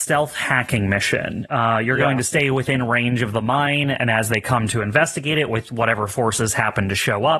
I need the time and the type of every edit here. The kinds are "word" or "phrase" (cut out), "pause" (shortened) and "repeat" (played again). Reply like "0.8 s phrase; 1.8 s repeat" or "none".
none